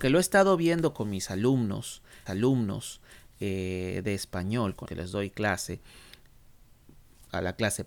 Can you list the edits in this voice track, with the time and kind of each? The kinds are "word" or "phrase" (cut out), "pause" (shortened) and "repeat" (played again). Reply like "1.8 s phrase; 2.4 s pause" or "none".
2.3 s repeat; 4.9 s word